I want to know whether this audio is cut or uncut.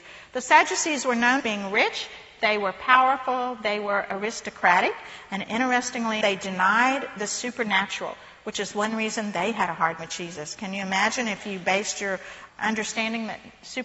cut